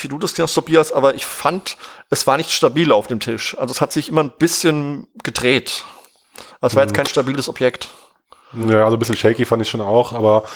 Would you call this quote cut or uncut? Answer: uncut